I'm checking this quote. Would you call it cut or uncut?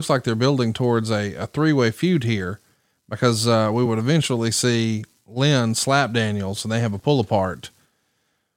uncut